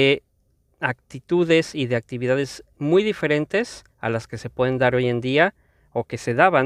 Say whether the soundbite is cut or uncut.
cut